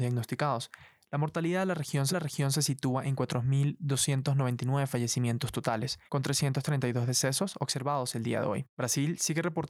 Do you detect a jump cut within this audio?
yes; 3 cuts; at 2.1 s, 6.1 s, 8.7 s

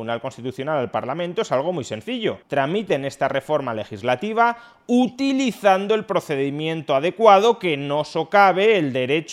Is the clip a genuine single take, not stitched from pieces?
no; 1 cut; at 2.4 s

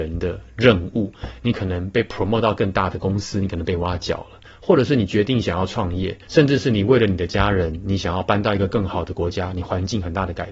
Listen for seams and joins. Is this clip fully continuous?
no; 2 cuts; at 4.5 s, 6.2 s

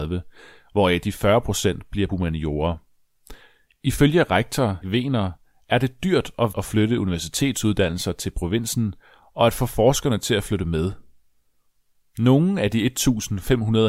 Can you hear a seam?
yes; 3 cuts; at 2.1 s, 4.8 s, 6.5 s

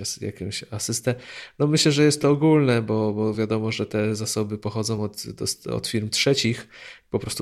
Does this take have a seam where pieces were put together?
no; 0 cuts

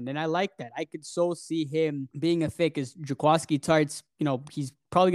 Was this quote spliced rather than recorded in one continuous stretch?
yes; 1 cut; at 2.1 s

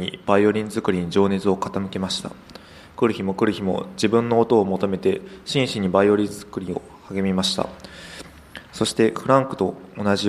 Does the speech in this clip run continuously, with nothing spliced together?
yes; 0 cuts

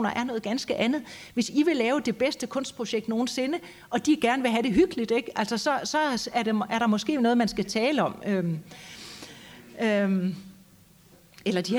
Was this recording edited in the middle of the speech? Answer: no; 0 cuts

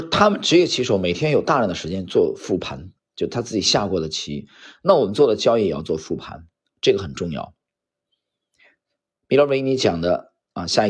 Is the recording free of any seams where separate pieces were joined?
yes; 0 cuts

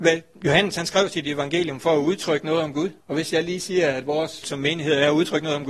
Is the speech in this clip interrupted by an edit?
yes; 2 cuts; at 3.0 s, 4.4 s

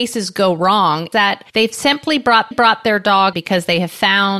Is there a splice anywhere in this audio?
yes; 4 cuts; at 1.1 s, 1.5 s, 2.5 s, 3.3 s

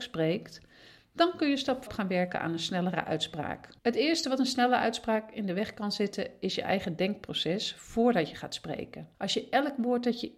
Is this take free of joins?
no; 3 cuts; at 1.9 s, 3.8 s, 9.1 s

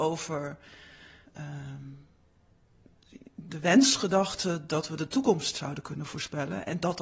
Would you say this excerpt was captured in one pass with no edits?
no; 1 cut; at 1.2 s

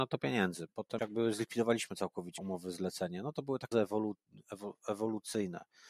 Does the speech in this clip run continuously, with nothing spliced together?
no; 3 cuts; at 1.0 s, 2.4 s, 3.7 s

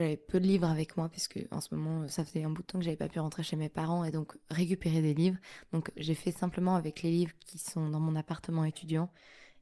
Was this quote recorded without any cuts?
yes; 0 cuts

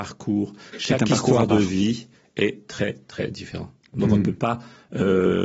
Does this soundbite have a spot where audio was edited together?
no; 0 cuts

